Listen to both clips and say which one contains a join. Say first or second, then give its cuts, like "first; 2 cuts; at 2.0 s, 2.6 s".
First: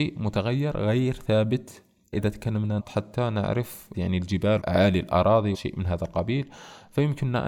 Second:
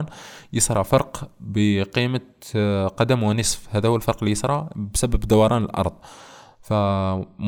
first; 5 cuts; at 2.1 s, 2.8 s, 3.9 s, 4.6 s, 5.5 s